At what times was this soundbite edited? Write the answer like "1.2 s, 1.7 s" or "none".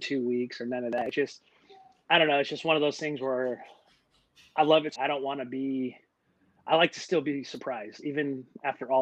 5.0 s